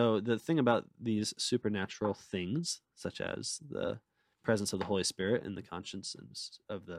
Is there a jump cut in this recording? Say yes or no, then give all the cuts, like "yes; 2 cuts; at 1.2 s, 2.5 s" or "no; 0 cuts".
no; 0 cuts